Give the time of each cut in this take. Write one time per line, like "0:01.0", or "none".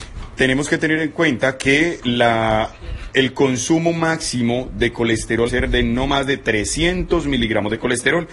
0:05.5